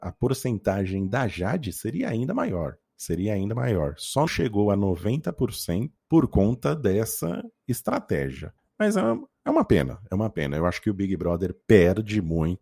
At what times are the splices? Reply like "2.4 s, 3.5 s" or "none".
2.8 s, 4.3 s, 6.0 s, 8.6 s, 11.6 s

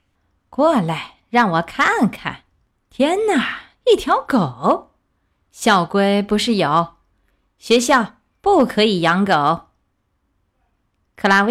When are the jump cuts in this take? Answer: none

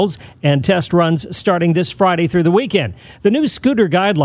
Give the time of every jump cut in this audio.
none

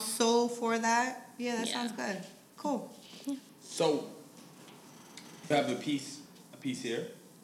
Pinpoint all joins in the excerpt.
5.5 s

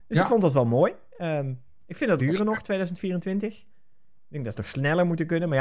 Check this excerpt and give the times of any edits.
2.2 s, 4.6 s

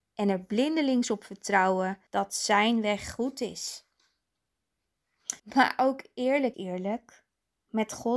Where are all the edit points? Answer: 2.1 s, 5.4 s, 6.5 s

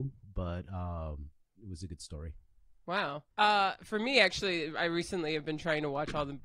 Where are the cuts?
1.6 s, 2.8 s, 3.3 s

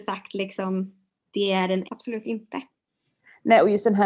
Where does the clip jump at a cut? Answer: 1.2 s, 1.9 s

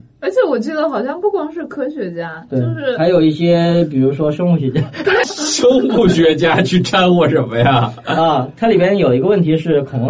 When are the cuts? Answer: 5.2 s

